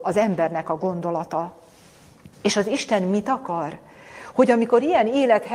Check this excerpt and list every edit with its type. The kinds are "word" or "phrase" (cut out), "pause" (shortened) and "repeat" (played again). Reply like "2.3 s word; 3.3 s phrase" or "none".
2.3 s pause